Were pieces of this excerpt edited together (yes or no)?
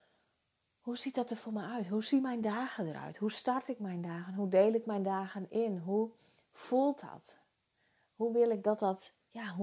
no